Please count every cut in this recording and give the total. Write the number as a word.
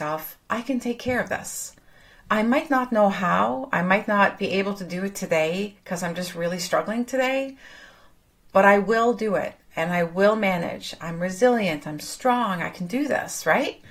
zero